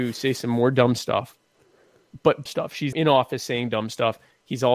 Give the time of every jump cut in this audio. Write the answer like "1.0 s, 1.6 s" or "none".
2.5 s, 2.9 s